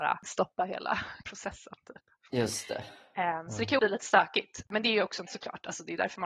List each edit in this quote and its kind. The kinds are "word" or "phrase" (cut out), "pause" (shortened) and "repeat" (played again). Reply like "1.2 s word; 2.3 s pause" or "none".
1.2 s word; 3.8 s word; 5.3 s word